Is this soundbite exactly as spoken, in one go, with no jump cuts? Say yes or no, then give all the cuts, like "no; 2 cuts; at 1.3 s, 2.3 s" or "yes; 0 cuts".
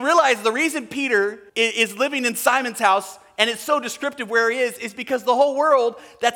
no; 1 cut; at 1.5 s